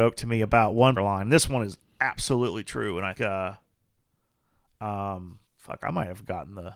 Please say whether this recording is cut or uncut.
cut